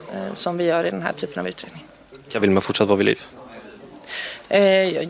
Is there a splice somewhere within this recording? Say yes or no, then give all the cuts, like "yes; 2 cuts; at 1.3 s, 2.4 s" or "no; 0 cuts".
no; 0 cuts